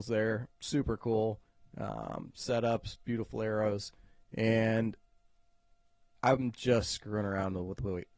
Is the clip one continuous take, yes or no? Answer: yes